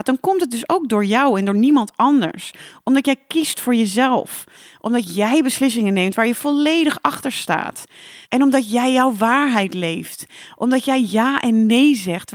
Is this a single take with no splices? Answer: no; 1 cut; at 8.2 s

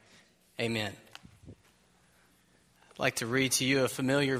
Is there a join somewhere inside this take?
yes; 1 cut; at 1.1 s

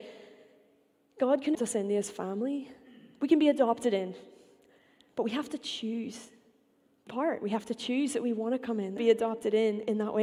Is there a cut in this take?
yes; 3 cuts; at 1.5 s, 7.1 s, 9.0 s

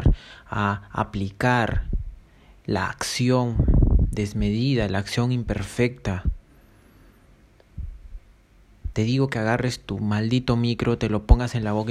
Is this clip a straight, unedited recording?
yes; 0 cuts

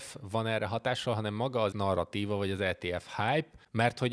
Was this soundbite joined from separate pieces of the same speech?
yes; 1 cut; at 1.7 s

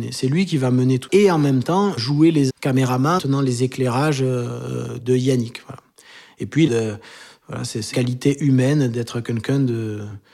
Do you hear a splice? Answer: yes; 7 cuts; at 1.1 s, 2.0 s, 2.5 s, 3.2 s, 5.0 s, 6.7 s, 7.9 s

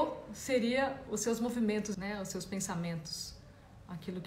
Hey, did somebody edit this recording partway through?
yes; 1 cut; at 1.9 s

